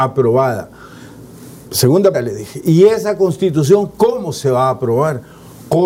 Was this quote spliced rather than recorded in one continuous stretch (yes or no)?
yes